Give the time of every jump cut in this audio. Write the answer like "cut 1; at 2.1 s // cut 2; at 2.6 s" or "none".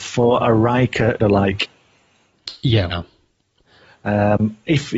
cut 1; at 1.2 s // cut 2; at 2.9 s